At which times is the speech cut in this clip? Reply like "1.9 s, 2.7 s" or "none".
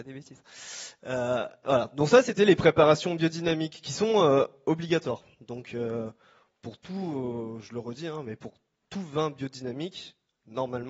none